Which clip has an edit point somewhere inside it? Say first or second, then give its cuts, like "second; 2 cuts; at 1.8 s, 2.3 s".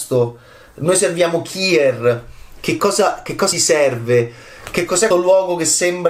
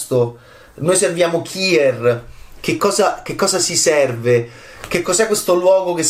first; 2 cuts; at 3.5 s, 5.1 s